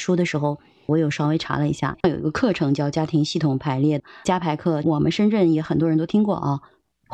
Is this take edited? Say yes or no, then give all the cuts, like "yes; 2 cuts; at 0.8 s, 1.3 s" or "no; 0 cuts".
yes; 1 cut; at 2.0 s